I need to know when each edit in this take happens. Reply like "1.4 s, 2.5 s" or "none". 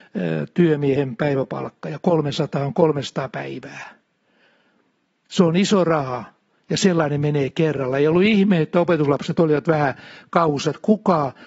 none